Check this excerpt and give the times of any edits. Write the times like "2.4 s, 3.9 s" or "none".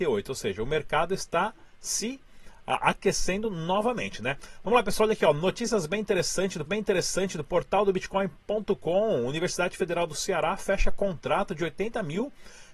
6.7 s